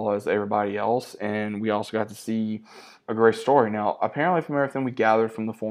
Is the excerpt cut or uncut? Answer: uncut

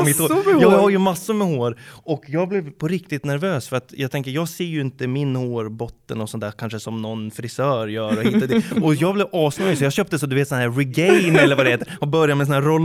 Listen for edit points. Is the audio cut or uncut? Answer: uncut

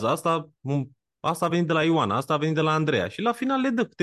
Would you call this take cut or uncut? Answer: uncut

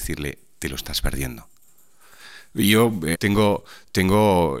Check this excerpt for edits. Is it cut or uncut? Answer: cut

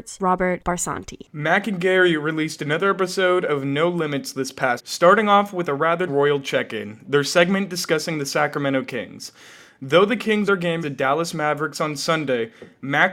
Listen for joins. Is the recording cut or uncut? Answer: cut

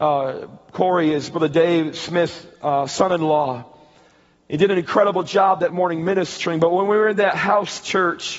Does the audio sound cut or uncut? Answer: cut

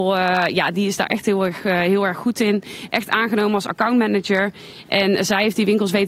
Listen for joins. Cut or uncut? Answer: uncut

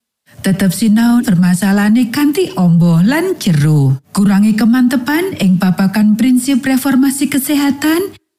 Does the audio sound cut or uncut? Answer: cut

